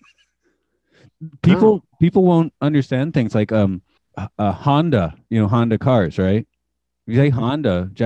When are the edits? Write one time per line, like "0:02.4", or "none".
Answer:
0:01.9
0:04.0